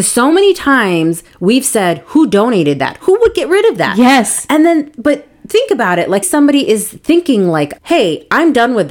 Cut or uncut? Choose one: cut